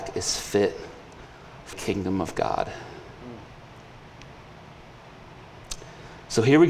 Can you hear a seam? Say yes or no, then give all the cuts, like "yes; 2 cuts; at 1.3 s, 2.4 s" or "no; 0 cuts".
yes; 1 cut; at 1.7 s